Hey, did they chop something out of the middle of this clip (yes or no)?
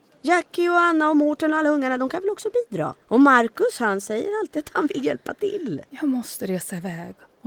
yes